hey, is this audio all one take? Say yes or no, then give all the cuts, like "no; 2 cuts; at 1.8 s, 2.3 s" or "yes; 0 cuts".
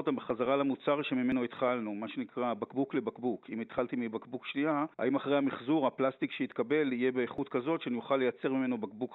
no; 1 cut; at 4.9 s